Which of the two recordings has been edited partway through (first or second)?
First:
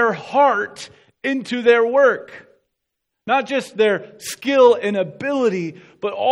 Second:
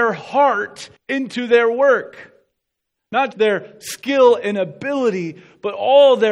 second